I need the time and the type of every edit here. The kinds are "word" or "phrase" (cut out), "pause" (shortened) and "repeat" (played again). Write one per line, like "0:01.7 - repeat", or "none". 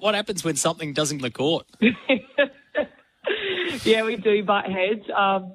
0:01.2 - phrase
0:04.2 - word